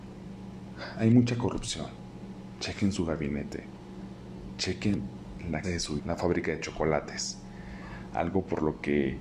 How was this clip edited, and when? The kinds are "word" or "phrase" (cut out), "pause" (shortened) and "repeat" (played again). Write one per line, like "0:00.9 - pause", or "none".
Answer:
0:05.6 - word
0:06.0 - word